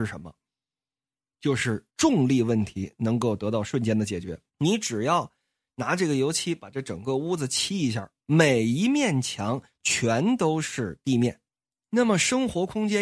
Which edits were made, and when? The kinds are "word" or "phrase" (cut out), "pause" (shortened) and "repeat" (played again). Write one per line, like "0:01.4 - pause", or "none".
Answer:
0:01.9 - pause
0:04.5 - pause
0:08.2 - pause